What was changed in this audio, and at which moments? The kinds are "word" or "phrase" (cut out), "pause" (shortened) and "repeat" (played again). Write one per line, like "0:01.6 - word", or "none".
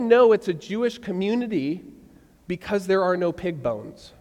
none